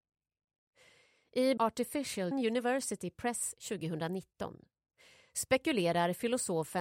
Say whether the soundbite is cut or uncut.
cut